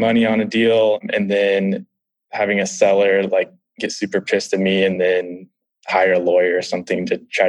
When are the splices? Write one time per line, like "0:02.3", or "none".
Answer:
none